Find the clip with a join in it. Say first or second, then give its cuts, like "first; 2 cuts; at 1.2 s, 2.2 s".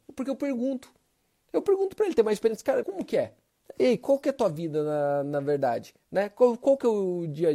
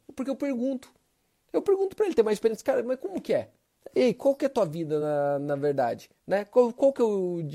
first; 1 cut; at 2.8 s